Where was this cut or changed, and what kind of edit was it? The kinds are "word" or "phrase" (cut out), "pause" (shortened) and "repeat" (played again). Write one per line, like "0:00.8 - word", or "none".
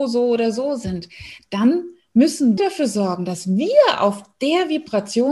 0:02.6 - word